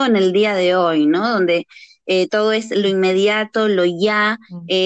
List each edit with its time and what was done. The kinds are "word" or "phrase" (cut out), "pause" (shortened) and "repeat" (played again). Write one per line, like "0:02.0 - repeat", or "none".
none